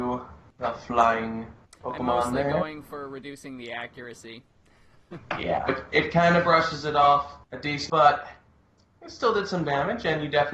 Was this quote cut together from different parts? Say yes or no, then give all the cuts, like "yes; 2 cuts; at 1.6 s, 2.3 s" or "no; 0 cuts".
yes; 4 cuts; at 1.6 s, 5.7 s, 7.4 s, 7.9 s